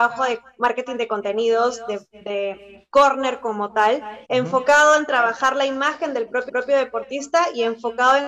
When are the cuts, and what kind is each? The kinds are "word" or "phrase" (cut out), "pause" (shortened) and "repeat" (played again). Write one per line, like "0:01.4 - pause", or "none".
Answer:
0:04.2 - pause
0:06.5 - repeat

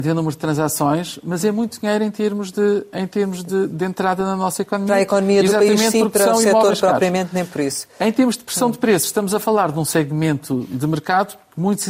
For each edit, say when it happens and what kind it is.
none

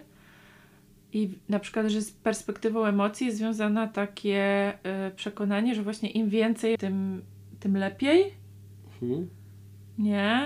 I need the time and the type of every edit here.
0:01.4 - pause
0:06.8 - word

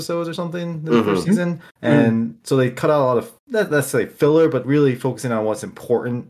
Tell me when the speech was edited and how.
0:01.7 - pause
0:03.4 - pause
0:04.6 - phrase

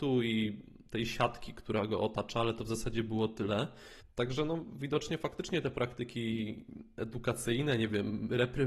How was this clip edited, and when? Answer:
0:04.0 - pause

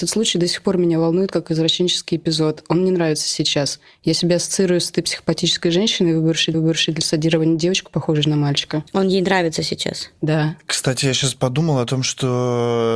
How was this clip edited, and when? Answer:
0:06.5 - repeat
0:08.9 - pause

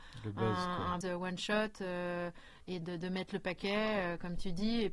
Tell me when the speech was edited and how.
0:01.0 - word
0:02.8 - word

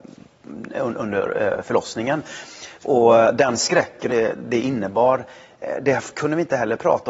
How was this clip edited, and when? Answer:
0:02.7 - pause
0:04.1 - phrase

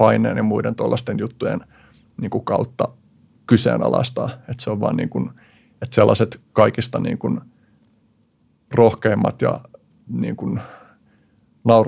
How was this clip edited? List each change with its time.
0:10.1 - word

